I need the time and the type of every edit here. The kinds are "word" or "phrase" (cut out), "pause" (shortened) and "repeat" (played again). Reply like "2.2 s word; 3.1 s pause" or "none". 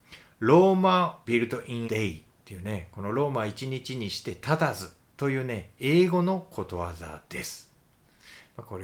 1.3 s phrase; 1.8 s word; 2.3 s pause